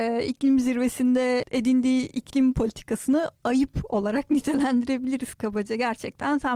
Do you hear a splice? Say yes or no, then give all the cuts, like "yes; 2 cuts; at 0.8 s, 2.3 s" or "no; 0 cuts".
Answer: no; 0 cuts